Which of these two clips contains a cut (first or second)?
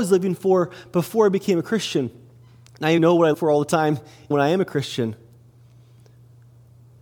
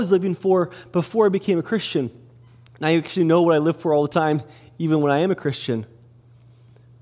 first